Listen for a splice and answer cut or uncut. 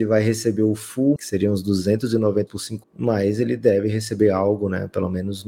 cut